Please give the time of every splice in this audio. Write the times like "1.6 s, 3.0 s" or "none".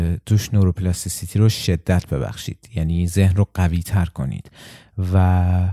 none